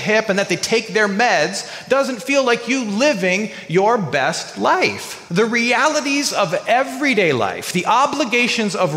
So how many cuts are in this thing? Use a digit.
1